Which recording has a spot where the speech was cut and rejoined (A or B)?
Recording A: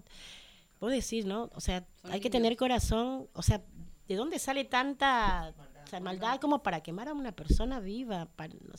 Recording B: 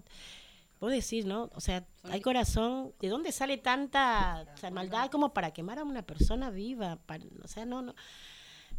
B